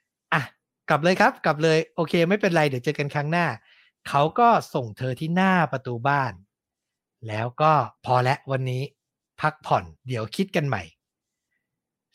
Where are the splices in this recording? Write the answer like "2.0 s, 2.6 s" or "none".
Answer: 8.0 s, 10.0 s